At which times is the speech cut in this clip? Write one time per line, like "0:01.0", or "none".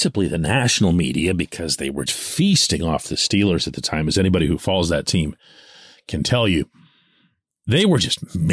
0:02.1